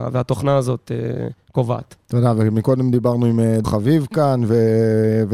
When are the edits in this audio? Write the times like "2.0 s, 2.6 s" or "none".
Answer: 3.6 s